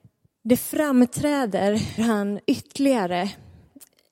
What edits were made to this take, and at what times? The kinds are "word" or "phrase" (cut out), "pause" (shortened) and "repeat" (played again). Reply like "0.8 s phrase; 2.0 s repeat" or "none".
2.0 s word; 2.4 s pause